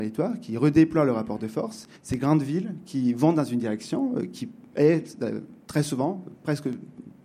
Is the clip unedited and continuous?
no; 2 cuts; at 2.0 s, 5.6 s

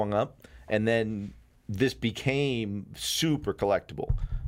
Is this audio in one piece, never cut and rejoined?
yes; 0 cuts

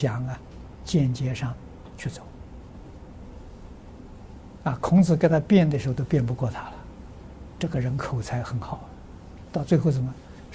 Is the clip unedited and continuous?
yes; 0 cuts

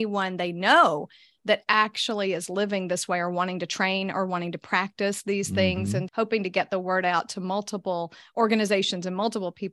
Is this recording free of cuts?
no; 1 cut; at 6.1 s

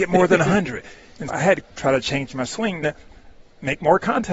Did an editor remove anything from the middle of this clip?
yes; 3 cuts; at 1.3 s, 1.6 s, 2.8 s

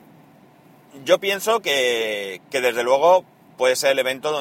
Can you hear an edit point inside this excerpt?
no; 0 cuts

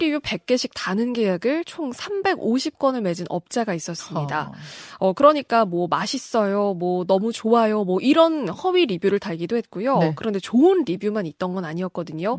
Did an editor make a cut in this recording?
no; 0 cuts

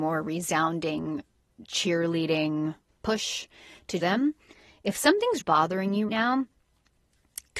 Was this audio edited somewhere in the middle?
yes; 4 cuts; at 2.9 s, 4.0 s, 5.4 s, 6.1 s

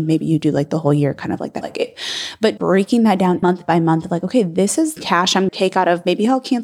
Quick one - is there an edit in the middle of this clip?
yes; 5 cuts; at 1.6 s, 2.6 s, 3.4 s, 5.0 s, 5.5 s

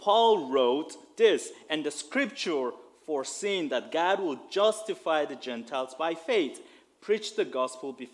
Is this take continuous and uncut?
yes; 0 cuts

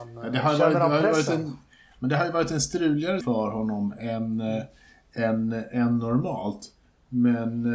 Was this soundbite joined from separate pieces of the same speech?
yes; 1 cut; at 3.2 s

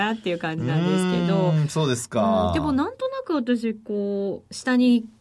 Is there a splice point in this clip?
no; 0 cuts

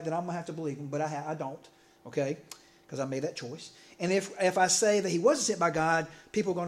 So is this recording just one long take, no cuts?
yes; 0 cuts

